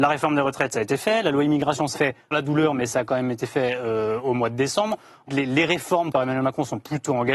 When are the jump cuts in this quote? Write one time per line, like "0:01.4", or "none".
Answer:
0:01.9
0:02.3
0:05.3
0:06.1

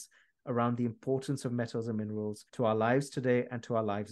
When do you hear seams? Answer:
0:02.5

